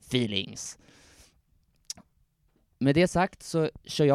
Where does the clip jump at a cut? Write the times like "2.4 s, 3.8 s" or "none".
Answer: none